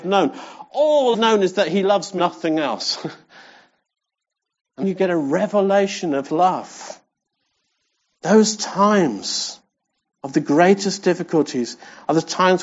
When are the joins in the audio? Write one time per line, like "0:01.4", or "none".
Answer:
0:01.1
0:02.2
0:04.8
0:06.3